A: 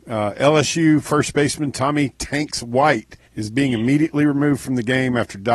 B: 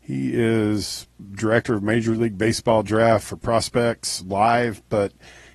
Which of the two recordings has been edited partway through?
A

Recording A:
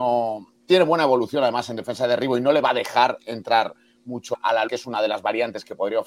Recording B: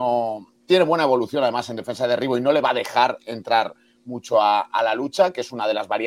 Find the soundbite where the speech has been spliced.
A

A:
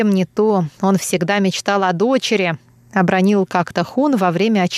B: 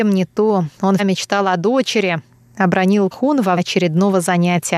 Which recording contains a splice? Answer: B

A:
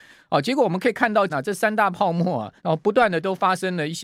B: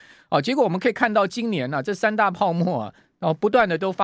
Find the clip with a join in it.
A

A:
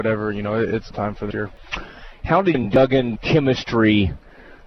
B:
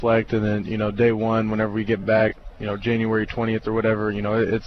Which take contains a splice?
A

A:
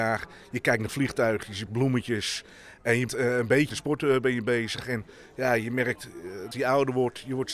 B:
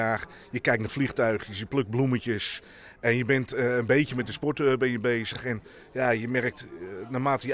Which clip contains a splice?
A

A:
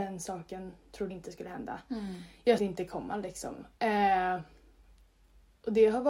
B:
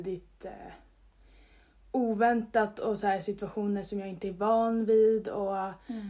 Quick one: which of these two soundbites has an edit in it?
A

